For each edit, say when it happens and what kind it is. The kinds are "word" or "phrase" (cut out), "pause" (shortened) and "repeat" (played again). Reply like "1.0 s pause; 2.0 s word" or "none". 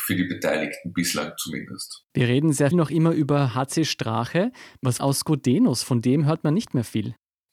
2.1 s pause; 2.7 s word; 5.0 s phrase